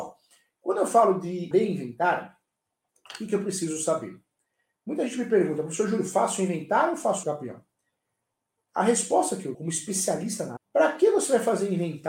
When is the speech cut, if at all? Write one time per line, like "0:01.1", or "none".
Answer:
0:01.5
0:07.2
0:09.5
0:10.6